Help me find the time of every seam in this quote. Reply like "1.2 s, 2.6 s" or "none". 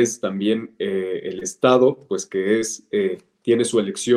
none